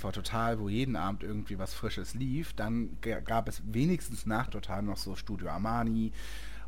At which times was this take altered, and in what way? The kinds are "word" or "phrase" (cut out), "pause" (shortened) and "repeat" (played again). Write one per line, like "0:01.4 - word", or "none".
0:04.5 - word